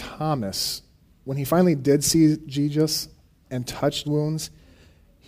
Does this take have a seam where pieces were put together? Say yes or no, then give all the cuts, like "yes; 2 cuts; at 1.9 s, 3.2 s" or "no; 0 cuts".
yes; 1 cut; at 4.0 s